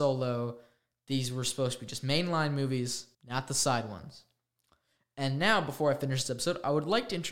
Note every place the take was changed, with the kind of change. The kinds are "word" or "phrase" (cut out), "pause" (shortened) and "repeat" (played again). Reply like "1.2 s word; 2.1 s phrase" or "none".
3.1 s pause